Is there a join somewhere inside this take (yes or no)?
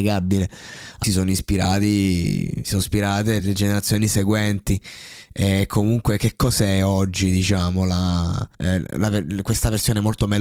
yes